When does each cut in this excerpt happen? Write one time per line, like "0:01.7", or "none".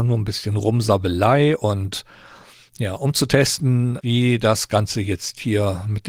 none